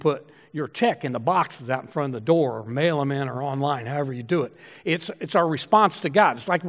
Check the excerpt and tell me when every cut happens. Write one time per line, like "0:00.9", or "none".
none